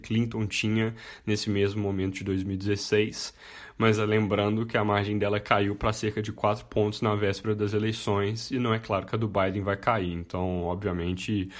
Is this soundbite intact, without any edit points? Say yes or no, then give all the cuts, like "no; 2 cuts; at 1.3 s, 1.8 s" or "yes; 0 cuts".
yes; 0 cuts